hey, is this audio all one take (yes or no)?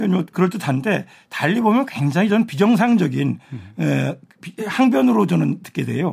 yes